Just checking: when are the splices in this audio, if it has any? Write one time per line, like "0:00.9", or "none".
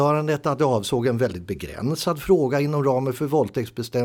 none